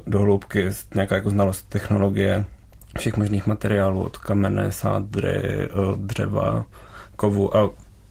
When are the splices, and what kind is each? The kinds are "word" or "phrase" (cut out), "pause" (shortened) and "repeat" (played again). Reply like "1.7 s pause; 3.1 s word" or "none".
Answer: 2.6 s pause